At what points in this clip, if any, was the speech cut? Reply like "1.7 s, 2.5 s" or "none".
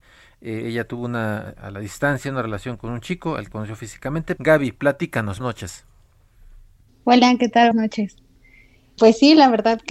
1.6 s, 2.8 s, 3.5 s, 4.4 s, 5.4 s, 7.7 s, 9.0 s